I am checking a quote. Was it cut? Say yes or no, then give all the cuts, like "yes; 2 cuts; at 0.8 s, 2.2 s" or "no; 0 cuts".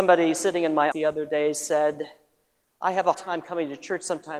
yes; 2 cuts; at 0.9 s, 3.1 s